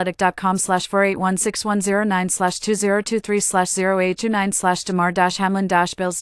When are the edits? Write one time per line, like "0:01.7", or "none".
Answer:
0:04.2